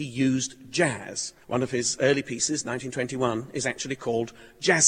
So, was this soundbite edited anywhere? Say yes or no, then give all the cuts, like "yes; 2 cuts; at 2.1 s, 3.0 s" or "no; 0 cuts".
yes; 1 cut; at 1.4 s